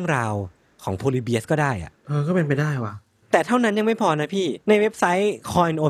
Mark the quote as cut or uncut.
cut